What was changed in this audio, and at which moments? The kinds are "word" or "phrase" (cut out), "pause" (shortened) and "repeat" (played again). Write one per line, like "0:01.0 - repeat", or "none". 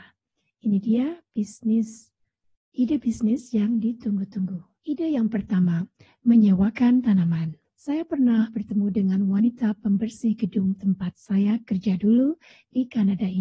0:04.8 - pause
0:07.6 - pause